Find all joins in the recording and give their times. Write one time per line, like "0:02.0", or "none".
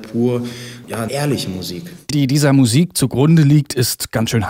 0:01.1
0:02.1